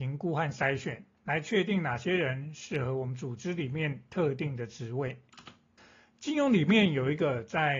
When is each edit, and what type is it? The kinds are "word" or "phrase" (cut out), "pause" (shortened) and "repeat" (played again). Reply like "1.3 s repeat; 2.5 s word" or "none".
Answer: 1.1 s pause; 5.8 s pause